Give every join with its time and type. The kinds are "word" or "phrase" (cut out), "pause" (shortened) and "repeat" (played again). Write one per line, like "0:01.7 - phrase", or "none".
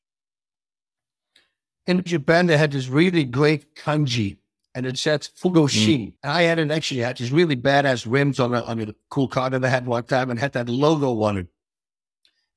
none